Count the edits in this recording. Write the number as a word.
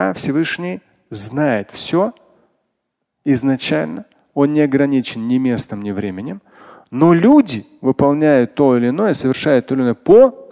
zero